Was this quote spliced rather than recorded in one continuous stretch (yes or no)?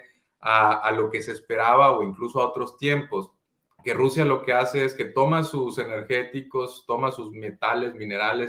no